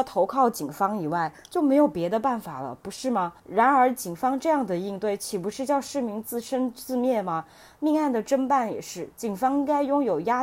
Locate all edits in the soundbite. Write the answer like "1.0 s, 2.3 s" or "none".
3.4 s, 9.1 s